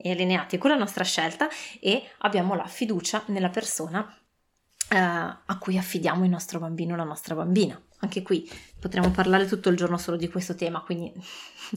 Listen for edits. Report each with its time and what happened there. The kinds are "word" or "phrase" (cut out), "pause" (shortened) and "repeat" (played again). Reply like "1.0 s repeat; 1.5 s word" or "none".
8.7 s pause